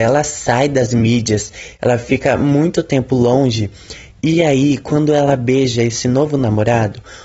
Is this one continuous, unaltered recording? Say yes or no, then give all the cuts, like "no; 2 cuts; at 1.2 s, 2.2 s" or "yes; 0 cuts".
yes; 0 cuts